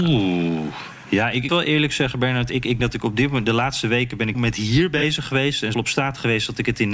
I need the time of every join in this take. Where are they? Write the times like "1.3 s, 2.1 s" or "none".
1.5 s, 2.8 s, 4.3 s, 5.7 s